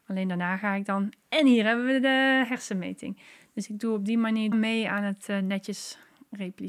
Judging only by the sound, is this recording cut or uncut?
cut